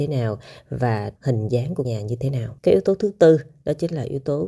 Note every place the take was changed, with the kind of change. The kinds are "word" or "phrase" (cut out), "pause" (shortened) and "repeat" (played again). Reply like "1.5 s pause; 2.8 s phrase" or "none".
1.2 s phrase; 1.8 s word; 2.6 s pause